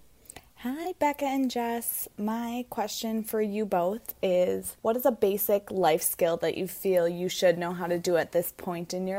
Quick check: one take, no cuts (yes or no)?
no